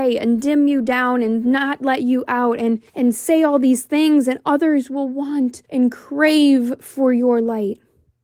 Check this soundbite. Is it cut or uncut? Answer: cut